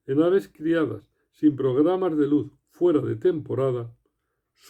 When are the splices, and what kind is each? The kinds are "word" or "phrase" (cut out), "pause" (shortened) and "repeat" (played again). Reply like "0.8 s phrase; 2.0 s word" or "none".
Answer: none